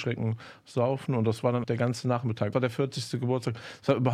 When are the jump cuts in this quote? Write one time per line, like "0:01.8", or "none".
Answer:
0:01.6
0:02.5